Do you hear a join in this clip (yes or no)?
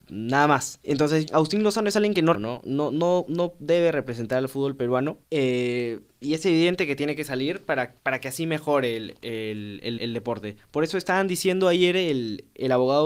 yes